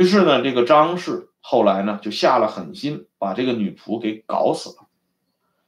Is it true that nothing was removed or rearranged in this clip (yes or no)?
no